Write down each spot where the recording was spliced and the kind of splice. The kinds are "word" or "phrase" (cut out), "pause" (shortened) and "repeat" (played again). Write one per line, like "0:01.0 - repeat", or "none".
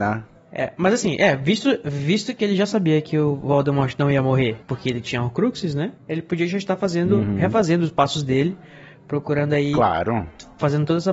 0:04.6 - pause
0:06.0 - pause